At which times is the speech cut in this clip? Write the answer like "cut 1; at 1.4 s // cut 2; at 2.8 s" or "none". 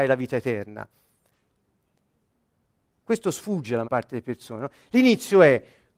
cut 1; at 3.8 s